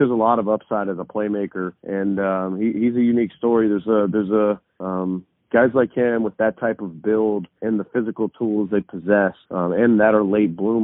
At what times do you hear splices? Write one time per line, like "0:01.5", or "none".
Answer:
0:01.8
0:04.7
0:07.6
0:09.4